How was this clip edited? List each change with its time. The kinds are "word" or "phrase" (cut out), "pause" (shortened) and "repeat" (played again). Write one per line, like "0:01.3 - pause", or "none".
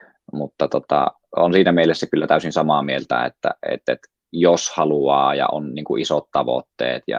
none